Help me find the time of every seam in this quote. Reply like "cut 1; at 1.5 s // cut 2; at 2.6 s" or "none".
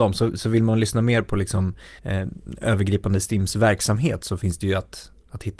cut 1; at 2.0 s